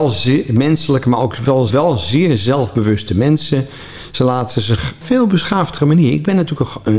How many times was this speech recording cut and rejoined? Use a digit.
2